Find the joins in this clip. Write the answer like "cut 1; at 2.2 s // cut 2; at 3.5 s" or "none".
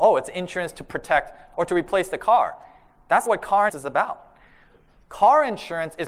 cut 1; at 1.5 s // cut 2; at 3.3 s // cut 3; at 3.7 s